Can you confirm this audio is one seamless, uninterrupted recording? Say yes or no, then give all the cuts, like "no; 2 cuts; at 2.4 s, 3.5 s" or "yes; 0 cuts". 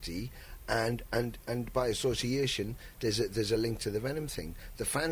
yes; 0 cuts